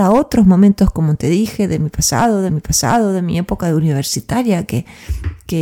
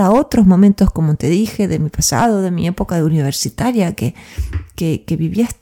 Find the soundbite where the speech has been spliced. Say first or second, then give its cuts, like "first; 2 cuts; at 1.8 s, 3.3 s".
first; 1 cut; at 2.5 s